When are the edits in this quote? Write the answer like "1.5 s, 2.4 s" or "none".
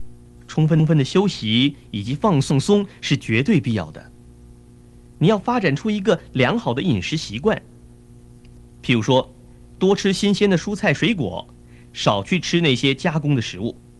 none